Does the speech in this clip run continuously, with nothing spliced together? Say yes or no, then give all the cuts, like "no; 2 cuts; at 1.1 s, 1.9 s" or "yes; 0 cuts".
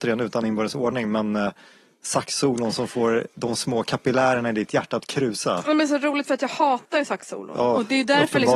yes; 0 cuts